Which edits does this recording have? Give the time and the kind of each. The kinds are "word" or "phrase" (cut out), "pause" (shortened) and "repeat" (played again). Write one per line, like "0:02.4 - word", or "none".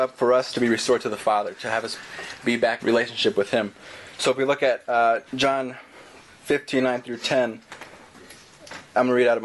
0:02.8 - word
0:05.3 - pause